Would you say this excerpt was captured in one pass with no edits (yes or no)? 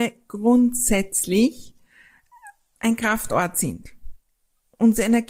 yes